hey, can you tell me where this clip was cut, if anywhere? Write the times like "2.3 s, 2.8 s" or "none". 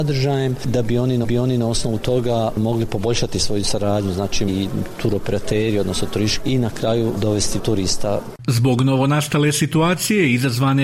1.2 s, 4.5 s, 6.4 s, 7.6 s